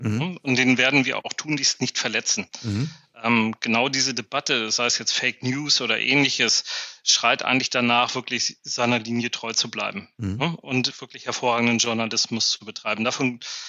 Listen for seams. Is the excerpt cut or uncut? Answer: uncut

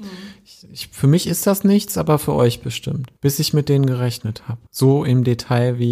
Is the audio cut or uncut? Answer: cut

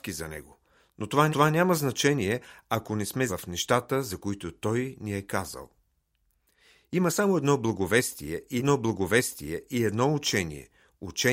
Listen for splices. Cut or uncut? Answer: cut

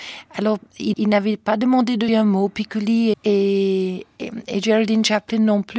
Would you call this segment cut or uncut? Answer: cut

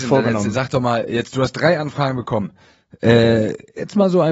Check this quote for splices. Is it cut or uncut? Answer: uncut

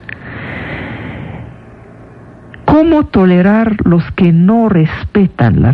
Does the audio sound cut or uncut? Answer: uncut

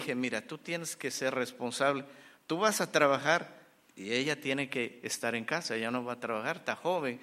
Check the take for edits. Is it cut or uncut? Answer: uncut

